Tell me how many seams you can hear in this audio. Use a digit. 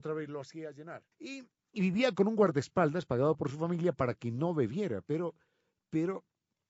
1